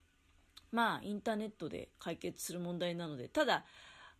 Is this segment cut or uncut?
cut